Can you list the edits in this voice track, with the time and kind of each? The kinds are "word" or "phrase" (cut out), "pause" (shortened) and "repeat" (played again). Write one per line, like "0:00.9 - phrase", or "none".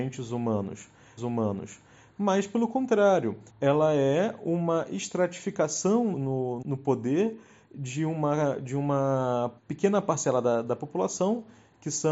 0:01.2 - repeat
0:03.5 - pause
0:06.1 - word
0:06.6 - word
0:09.6 - pause